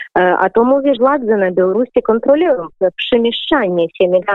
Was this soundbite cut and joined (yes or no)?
yes